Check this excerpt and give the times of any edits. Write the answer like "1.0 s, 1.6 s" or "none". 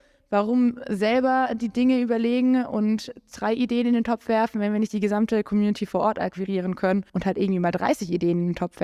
7.1 s